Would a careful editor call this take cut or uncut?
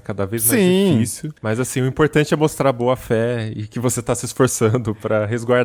cut